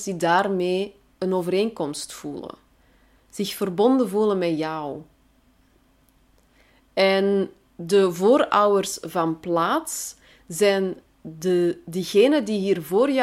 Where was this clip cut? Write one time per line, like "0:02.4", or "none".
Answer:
none